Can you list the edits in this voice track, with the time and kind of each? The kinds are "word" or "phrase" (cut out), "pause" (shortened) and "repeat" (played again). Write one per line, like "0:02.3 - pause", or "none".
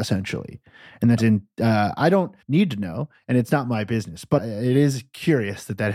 0:01.2 - word
0:02.4 - pause
0:04.4 - word